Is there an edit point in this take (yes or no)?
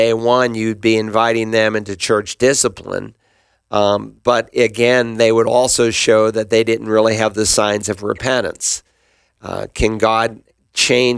yes